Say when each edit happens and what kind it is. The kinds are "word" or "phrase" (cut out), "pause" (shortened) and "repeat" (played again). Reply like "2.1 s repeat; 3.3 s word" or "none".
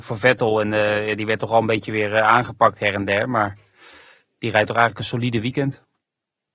none